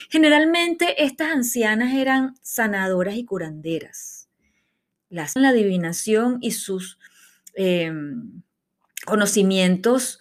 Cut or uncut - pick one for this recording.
cut